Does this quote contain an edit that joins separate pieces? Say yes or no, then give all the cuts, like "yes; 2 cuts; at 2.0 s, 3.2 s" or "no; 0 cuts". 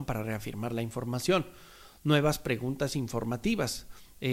no; 0 cuts